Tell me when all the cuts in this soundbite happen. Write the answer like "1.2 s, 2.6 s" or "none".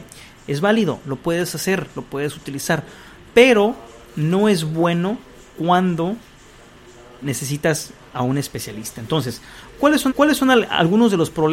7.2 s, 10.1 s